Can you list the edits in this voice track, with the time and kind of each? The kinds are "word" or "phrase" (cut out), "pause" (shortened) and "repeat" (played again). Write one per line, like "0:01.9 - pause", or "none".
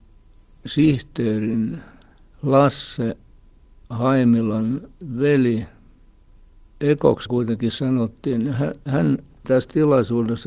0:07.3 - word
0:09.4 - word